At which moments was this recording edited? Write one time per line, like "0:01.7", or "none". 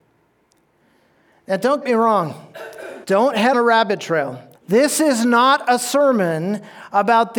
0:01.8
0:03.0
0:03.5
0:04.6